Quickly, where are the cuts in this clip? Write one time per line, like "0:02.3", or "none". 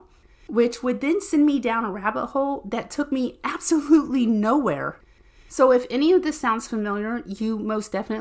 none

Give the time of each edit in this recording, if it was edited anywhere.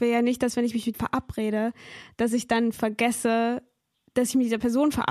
0:00.9

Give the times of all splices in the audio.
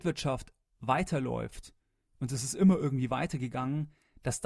none

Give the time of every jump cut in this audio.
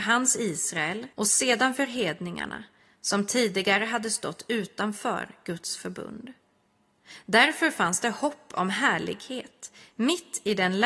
0:01.1

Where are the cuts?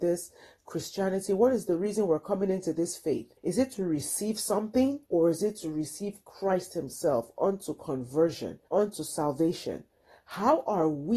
0:03.4
0:05.0
0:08.7

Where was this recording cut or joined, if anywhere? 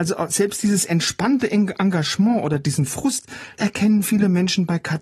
0:03.6

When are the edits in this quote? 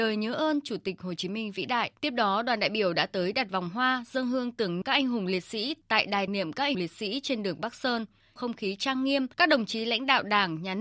0:02.0
0:04.8
0:06.3
0:06.7
0:08.4
0:09.3

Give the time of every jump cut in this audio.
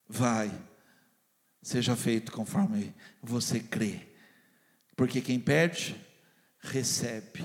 none

